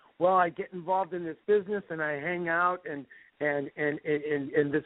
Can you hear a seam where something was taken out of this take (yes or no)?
no